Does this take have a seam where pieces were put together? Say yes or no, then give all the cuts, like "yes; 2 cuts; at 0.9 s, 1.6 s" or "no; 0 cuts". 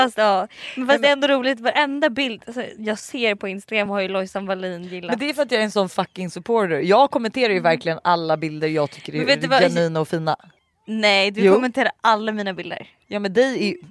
no; 0 cuts